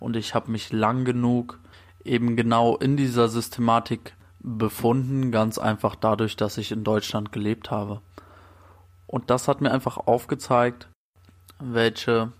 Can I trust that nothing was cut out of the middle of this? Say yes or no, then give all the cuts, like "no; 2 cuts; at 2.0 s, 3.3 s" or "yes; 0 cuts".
yes; 0 cuts